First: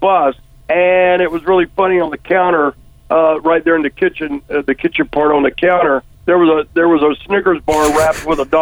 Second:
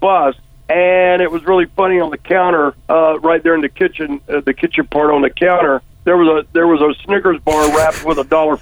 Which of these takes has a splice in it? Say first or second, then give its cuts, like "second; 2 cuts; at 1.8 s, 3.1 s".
second; 1 cut; at 2.8 s